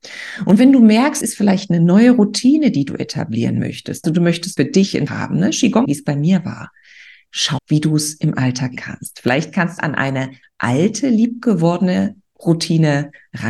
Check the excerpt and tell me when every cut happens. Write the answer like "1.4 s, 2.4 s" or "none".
1.2 s, 4.0 s, 4.6 s, 5.1 s, 5.8 s, 7.6 s, 8.8 s, 9.8 s